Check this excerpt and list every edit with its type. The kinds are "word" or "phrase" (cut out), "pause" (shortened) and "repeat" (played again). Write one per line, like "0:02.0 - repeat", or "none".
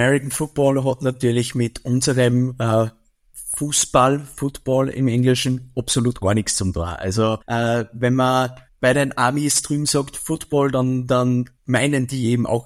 0:07.4 - pause
0:08.7 - pause
0:11.6 - pause